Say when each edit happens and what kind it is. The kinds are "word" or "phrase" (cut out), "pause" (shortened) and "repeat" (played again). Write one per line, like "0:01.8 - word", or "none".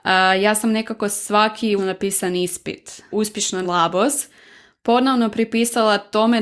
0:01.8 - word
0:03.1 - word
0:03.6 - word